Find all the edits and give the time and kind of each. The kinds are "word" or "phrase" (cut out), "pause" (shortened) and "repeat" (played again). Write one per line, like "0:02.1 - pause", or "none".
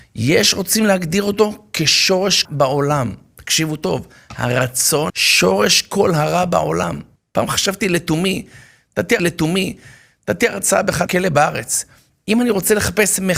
0:02.4 - phrase
0:05.1 - word
0:07.2 - pause
0:09.2 - repeat
0:11.1 - word